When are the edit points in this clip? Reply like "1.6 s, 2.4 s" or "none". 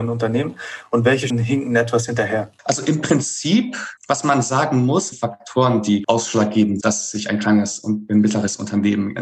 1.3 s, 2.6 s, 4.0 s, 5.1 s, 6.0 s, 6.8 s